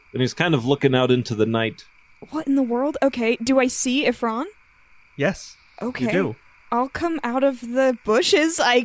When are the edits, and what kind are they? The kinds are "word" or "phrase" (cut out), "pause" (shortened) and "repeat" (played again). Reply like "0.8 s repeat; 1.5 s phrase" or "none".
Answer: none